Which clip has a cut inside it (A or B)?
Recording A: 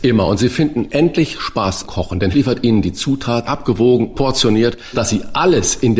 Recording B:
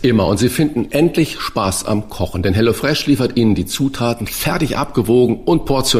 A